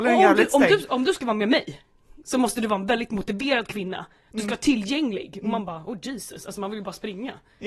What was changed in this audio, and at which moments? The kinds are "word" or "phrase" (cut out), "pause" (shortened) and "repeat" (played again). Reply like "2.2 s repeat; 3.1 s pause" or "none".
none